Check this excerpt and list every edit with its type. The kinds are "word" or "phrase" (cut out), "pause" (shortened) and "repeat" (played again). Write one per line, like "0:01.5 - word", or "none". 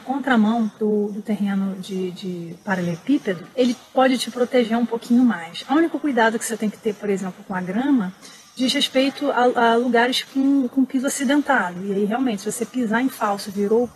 none